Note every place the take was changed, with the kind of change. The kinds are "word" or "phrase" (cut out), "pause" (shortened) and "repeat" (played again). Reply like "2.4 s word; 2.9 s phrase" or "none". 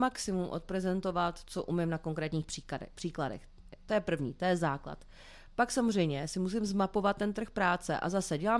none